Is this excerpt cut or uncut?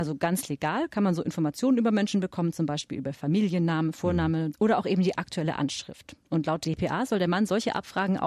cut